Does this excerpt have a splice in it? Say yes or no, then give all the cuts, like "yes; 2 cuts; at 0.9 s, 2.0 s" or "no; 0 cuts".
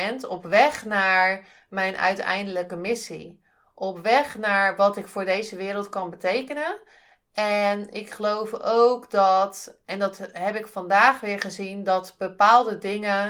no; 0 cuts